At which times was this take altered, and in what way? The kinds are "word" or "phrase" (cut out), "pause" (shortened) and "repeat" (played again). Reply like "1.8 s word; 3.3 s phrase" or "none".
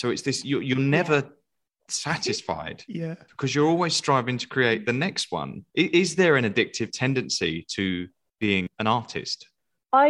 5.7 s pause

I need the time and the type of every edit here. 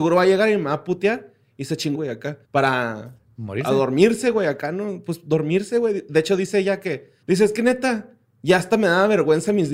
1.9 s phrase; 2.4 s pause; 7.2 s pause

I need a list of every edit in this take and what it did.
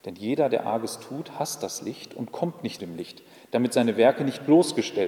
2.8 s word

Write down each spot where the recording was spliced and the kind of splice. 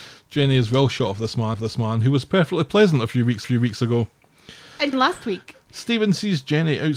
1.5 s repeat; 3.4 s repeat; 4.9 s word

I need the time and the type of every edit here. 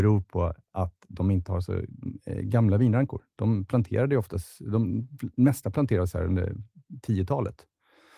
none

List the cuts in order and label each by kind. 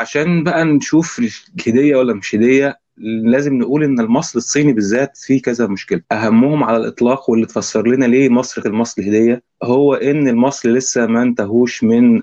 2.9 s pause; 6.0 s pause; 8.6 s word; 9.5 s pause

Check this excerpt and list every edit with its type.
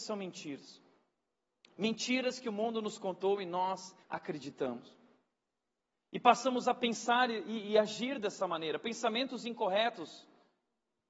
4.0 s pause

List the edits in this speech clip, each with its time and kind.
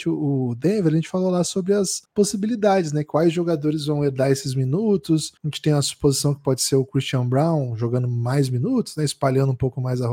2.1 s pause; 5.4 s pause

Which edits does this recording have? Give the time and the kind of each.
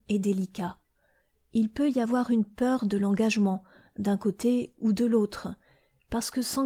none

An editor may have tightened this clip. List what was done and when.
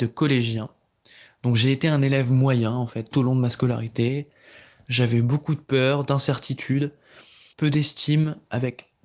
3.1 s word; 7.5 s pause

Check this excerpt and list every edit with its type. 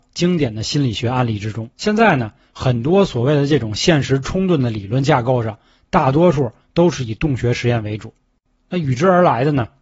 1.7 s pause

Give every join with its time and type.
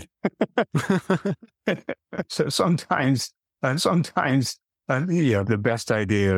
3.8 s repeat; 5.4 s word

